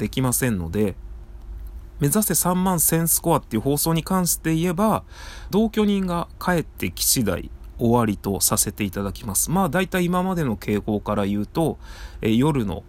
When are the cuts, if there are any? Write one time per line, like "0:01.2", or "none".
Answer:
0:05.5